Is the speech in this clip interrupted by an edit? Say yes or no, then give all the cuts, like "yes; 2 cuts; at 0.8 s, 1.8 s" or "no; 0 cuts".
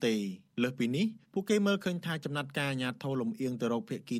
yes; 1 cut; at 1.2 s